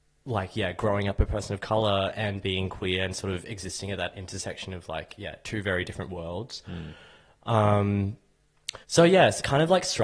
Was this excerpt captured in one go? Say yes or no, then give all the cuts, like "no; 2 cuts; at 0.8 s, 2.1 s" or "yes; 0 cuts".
no; 1 cut; at 8.8 s